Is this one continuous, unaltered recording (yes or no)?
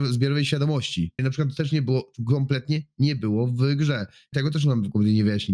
no